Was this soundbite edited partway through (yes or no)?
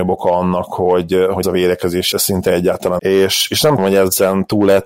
yes